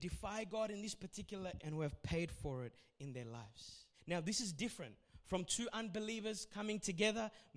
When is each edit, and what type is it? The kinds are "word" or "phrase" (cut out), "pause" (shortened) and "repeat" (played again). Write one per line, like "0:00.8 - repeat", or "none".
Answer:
0:01.6 - word
0:03.9 - pause